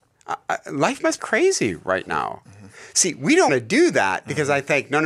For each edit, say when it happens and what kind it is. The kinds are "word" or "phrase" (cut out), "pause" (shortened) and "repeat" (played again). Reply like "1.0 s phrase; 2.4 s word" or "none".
1.2 s phrase; 3.5 s word